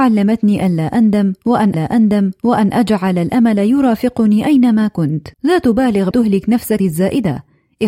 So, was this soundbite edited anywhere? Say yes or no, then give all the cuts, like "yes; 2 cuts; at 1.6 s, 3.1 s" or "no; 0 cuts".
yes; 4 cuts; at 1.7 s, 5.3 s, 6.1 s, 6.8 s